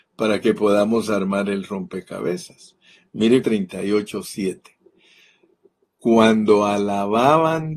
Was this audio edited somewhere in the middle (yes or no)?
yes